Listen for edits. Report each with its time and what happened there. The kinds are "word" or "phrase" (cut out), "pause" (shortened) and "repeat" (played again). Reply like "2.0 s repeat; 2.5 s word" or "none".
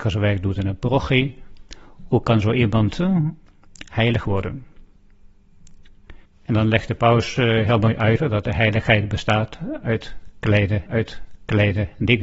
6.2 s pause; 10.9 s repeat